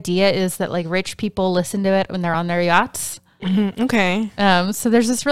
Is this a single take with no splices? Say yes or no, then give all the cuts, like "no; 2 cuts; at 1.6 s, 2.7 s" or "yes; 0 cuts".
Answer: yes; 0 cuts